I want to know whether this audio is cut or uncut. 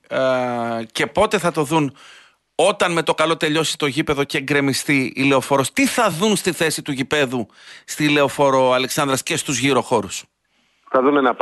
uncut